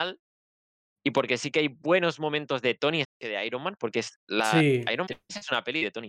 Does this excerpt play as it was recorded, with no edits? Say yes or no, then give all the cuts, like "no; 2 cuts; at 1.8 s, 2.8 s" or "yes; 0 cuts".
no; 2 cuts; at 3.0 s, 5.1 s